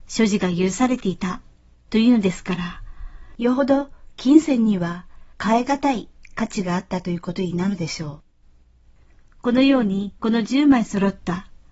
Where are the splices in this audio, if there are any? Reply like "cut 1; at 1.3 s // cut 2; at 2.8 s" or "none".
cut 1; at 5.3 s // cut 2; at 10.2 s